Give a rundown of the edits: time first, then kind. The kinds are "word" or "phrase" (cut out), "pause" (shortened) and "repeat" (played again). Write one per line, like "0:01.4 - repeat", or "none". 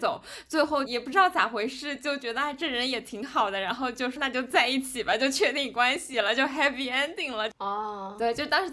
0:04.2 - word